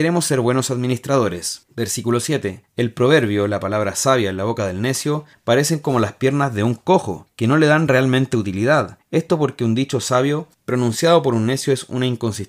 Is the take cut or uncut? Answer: uncut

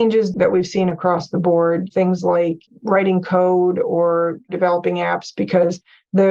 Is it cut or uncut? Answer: uncut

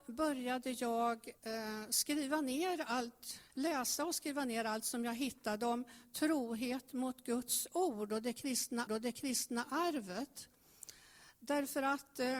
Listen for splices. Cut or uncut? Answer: cut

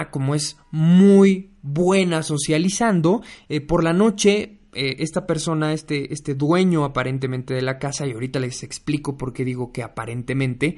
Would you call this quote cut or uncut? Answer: uncut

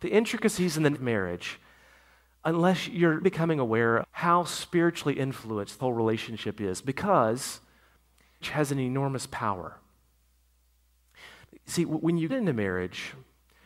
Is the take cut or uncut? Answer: cut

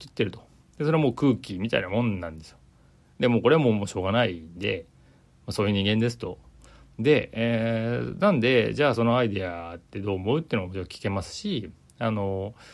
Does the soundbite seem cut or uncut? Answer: uncut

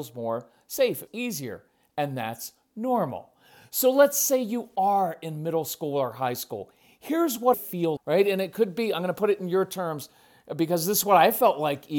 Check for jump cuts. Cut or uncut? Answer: cut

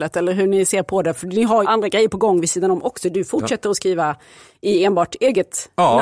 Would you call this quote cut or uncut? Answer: cut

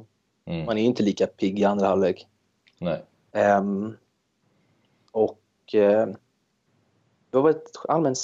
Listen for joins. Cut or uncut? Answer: uncut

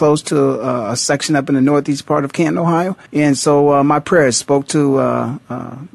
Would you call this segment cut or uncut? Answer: cut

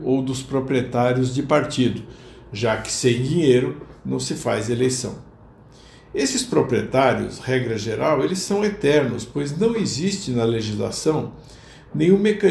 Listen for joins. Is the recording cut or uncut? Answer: uncut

